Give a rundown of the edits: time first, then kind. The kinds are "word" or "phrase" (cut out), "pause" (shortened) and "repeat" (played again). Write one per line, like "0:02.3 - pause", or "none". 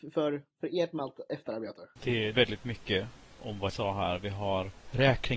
0:02.3 - phrase
0:03.4 - word
0:03.7 - word

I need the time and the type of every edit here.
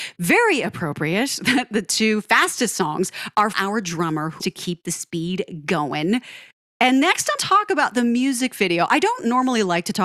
0:03.5 - word
0:04.4 - word
0:07.4 - word

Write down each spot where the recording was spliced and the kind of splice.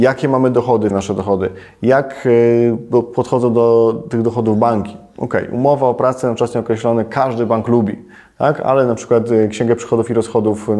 0:00.9 - word

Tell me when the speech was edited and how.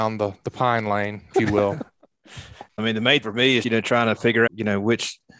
0:01.3 - word
0:02.8 - word
0:03.2 - word
0:03.6 - word
0:04.5 - word

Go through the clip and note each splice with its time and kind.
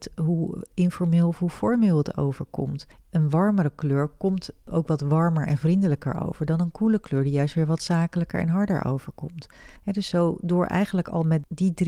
0:02.9 - pause
0:09.8 - pause

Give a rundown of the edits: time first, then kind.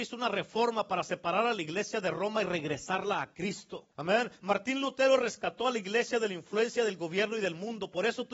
0:03.9 - pause

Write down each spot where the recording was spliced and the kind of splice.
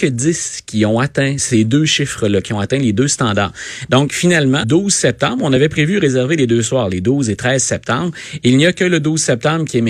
0:01.4 - word
0:04.6 - word

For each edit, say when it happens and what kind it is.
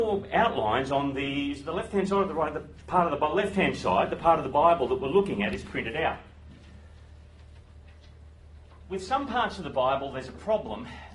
none

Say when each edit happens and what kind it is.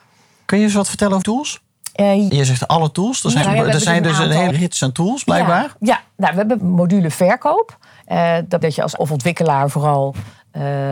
0:01.2 - word
0:02.3 - word
0:03.4 - word
0:04.5 - word
0:06.6 - word
0:08.6 - word
0:09.0 - word

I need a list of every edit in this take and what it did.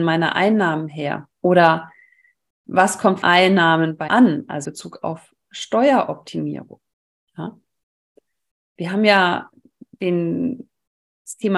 0:01.3 - pause
0:03.2 - phrase
0:04.1 - word
0:04.6 - word

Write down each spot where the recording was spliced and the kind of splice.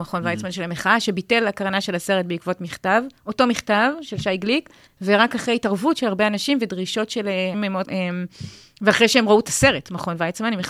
0:03.2 - pause
0:04.9 - pause
0:07.5 - word
0:07.8 - word

